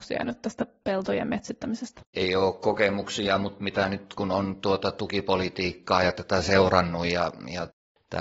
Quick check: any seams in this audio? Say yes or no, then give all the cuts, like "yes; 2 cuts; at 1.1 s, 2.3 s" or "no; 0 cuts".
yes; 1 cut; at 2.1 s